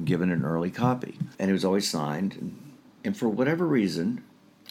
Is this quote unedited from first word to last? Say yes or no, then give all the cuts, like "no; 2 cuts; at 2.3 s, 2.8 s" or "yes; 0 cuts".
no; 1 cut; at 1.3 s